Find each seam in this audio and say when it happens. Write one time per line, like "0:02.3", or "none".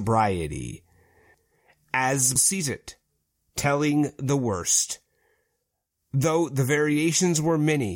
0:02.4